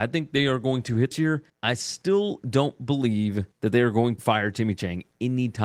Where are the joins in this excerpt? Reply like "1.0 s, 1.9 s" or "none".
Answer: 1.1 s, 1.5 s, 3.5 s, 4.2 s